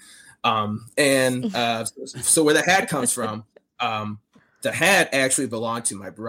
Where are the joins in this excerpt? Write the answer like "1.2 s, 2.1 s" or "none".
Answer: none